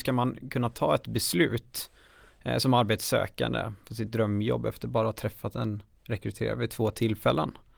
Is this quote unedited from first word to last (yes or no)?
yes